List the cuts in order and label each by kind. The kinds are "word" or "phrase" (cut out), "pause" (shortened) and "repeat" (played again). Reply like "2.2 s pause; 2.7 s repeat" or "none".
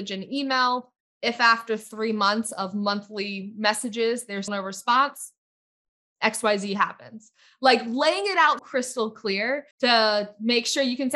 4.5 s word; 8.6 s word; 9.7 s pause